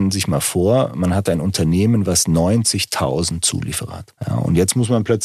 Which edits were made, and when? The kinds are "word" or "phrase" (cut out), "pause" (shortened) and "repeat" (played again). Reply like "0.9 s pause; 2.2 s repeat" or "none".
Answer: 4.2 s pause